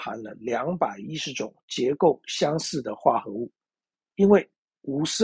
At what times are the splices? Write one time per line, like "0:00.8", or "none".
0:03.7